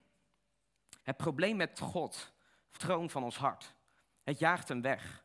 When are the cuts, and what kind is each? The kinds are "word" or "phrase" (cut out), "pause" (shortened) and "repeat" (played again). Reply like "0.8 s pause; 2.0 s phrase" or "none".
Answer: 1.0 s pause; 1.7 s phrase; 2.8 s word